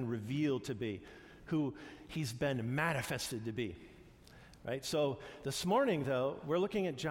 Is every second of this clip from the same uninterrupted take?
yes; 0 cuts

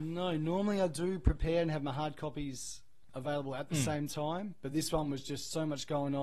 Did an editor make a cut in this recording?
no; 0 cuts

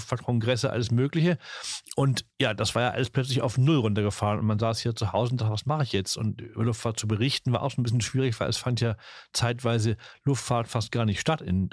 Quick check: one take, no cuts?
yes; 0 cuts

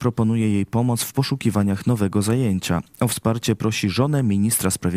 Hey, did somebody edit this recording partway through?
no; 0 cuts

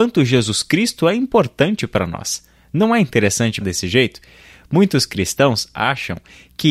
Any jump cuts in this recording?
yes; 1 cut; at 3.6 s

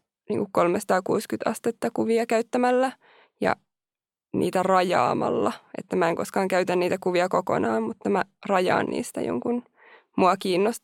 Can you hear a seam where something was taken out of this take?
no; 0 cuts

